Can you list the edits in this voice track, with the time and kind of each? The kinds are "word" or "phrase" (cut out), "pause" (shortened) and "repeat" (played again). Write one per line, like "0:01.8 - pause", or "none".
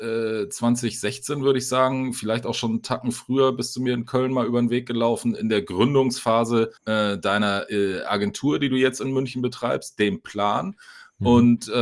0:06.8 - pause